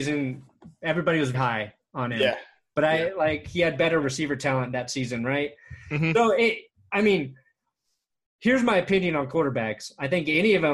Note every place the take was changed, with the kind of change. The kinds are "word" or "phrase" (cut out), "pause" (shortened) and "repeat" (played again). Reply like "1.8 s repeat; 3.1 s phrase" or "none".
1.3 s word; 4.0 s word; 9.3 s word